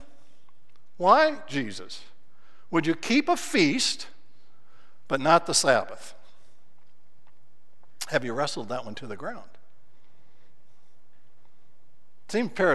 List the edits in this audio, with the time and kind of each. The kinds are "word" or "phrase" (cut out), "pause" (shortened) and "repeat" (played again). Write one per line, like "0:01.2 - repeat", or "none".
none